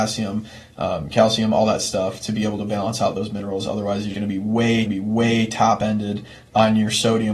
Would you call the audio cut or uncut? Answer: cut